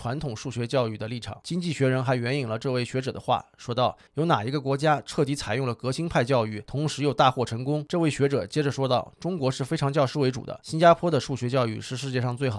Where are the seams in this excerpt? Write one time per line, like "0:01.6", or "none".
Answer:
0:04.1